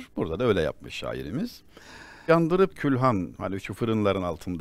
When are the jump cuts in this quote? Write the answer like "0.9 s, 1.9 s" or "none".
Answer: 2.3 s, 2.7 s